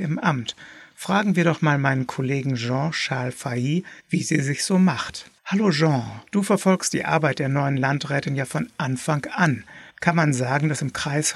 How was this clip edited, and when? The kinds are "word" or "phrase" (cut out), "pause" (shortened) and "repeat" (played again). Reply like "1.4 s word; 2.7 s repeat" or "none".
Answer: 4.0 s pause; 5.4 s pause; 6.3 s pause; 9.9 s pause